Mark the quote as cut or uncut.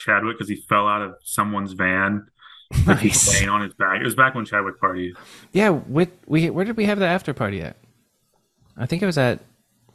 uncut